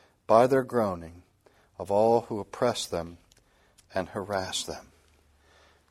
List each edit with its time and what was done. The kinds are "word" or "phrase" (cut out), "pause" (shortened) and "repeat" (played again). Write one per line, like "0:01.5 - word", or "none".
none

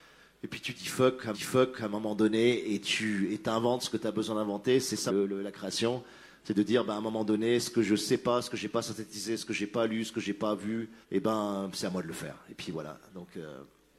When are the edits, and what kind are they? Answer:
0:01.3 - repeat
0:05.1 - phrase
0:11.0 - pause

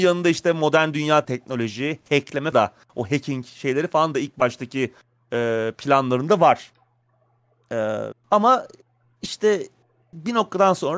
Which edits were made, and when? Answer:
0:01.2 - word
0:02.5 - word
0:08.1 - word

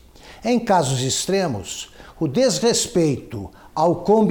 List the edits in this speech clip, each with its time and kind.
none

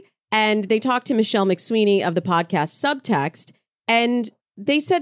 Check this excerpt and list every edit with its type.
none

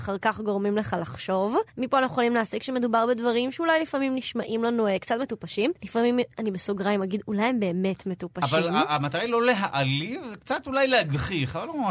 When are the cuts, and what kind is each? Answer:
0:01.7 - pause
0:05.8 - pause

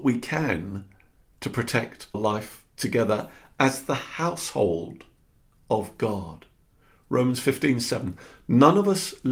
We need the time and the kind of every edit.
0:02.1 - word

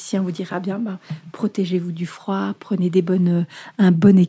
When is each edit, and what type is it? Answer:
none

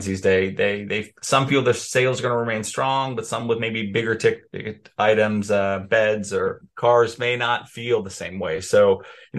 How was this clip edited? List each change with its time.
none

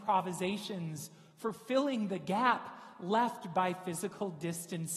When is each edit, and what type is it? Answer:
none

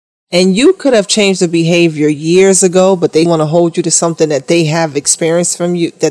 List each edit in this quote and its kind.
0:03.3 - word

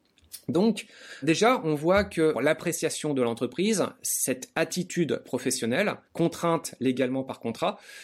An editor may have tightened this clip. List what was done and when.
0:01.2 - word
0:02.3 - word
0:06.0 - pause

